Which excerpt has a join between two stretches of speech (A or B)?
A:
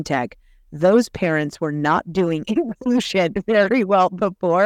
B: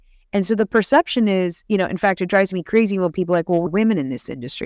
B